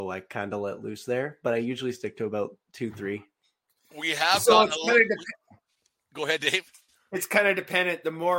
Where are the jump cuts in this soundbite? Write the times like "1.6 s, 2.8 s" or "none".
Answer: none